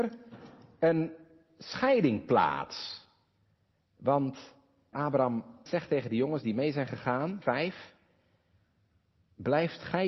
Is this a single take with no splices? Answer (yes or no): no